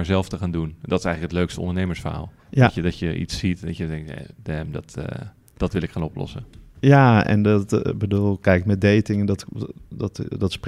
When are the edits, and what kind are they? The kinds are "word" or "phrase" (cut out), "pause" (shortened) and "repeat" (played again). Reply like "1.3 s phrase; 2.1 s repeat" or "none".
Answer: 2.4 s pause; 4.3 s pause